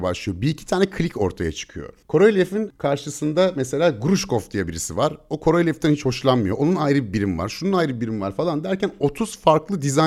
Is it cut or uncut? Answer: cut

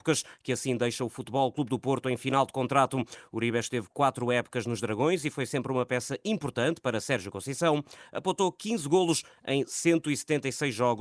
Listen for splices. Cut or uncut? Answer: uncut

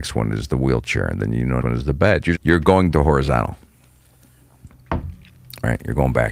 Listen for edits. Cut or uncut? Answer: cut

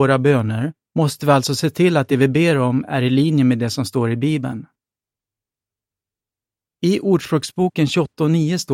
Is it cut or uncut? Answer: uncut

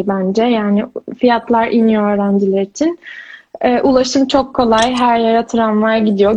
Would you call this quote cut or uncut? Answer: uncut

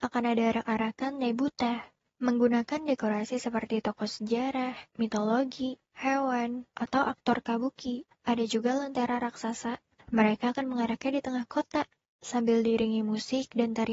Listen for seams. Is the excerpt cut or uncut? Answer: uncut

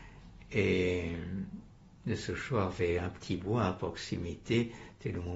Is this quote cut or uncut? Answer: uncut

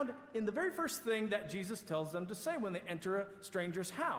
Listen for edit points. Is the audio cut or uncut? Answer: uncut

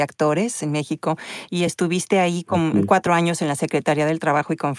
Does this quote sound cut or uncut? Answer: uncut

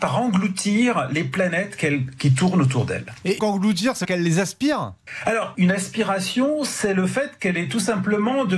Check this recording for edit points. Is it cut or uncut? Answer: cut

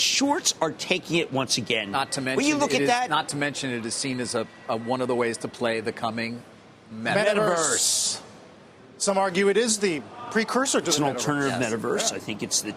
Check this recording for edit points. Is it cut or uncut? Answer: cut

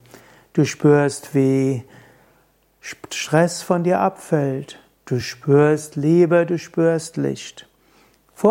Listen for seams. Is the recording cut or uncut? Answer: uncut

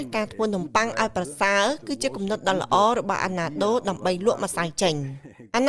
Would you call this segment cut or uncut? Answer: uncut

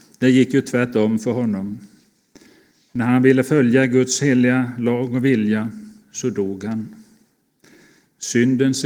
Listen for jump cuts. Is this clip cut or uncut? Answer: uncut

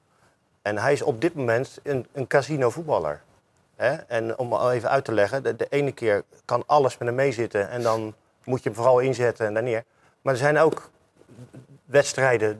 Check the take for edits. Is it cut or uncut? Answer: uncut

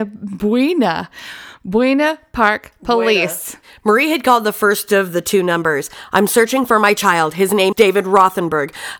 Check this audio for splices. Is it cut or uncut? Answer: cut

